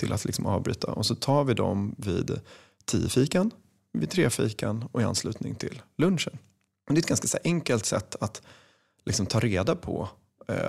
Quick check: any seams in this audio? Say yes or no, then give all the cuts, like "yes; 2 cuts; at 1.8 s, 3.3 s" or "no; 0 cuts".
no; 0 cuts